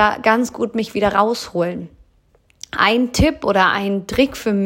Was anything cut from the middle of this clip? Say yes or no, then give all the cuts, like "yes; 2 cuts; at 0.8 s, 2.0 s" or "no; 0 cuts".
no; 0 cuts